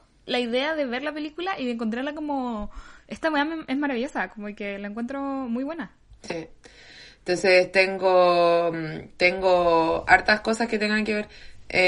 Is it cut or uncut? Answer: uncut